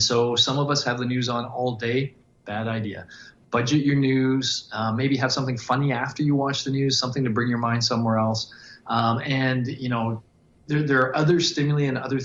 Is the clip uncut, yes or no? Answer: yes